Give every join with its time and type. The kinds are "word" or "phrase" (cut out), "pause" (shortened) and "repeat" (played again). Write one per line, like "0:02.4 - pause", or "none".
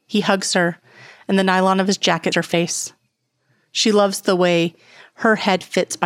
0:02.3 - word